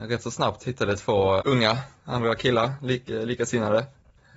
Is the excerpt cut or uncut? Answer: cut